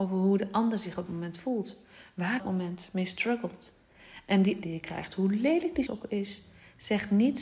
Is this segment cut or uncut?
cut